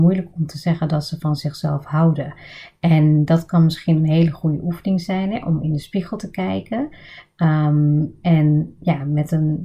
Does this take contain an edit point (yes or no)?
no